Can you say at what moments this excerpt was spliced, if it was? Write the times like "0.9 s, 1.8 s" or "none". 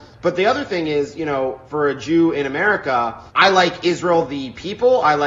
1.7 s, 3.3 s